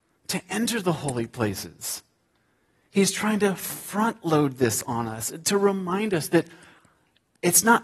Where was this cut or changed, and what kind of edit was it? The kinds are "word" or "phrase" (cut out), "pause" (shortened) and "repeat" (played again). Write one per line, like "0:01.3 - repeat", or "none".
none